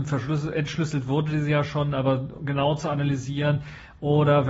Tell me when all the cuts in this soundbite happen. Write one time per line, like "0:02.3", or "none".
none